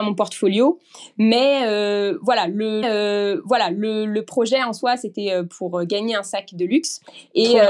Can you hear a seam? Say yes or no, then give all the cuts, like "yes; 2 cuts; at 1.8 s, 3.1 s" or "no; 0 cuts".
yes; 1 cut; at 2.8 s